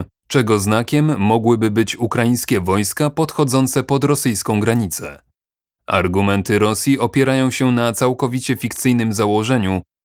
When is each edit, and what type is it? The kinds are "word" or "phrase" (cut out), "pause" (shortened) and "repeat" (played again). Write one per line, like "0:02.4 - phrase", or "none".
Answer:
none